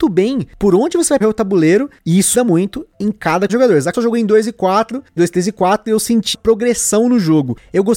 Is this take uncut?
no; 6 cuts; at 1.2 s, 2.3 s, 3.5 s, 3.9 s, 5.2 s, 6.3 s

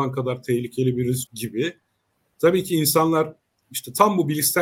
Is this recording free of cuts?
no; 1 cut; at 1.3 s

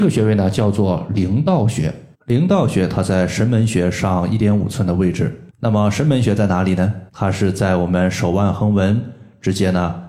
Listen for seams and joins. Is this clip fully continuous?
no; 3 cuts; at 2.1 s, 5.5 s, 7.1 s

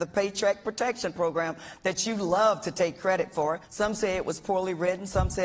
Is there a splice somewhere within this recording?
yes; 1 cut; at 3.6 s

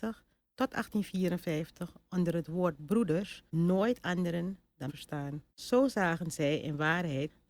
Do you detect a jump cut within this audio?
yes; 3 cuts; at 3.5 s, 4.9 s, 5.5 s

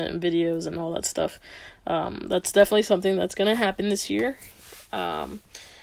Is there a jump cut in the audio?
no; 0 cuts

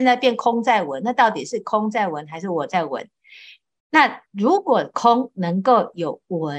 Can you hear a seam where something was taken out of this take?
no; 0 cuts

